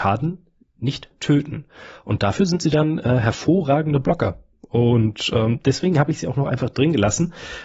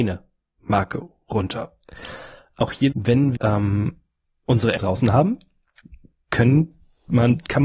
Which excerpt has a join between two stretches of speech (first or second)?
second